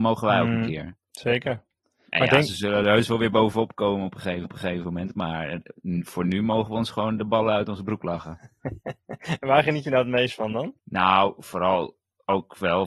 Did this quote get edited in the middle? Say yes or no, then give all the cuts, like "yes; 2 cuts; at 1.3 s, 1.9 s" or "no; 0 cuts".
yes; 3 cuts; at 1.0 s, 4.4 s, 10.8 s